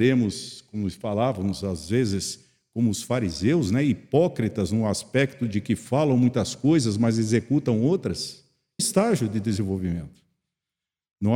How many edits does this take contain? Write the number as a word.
one